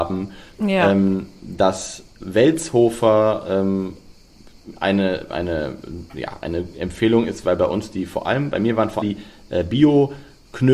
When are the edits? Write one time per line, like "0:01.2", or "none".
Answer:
0:05.3
0:09.0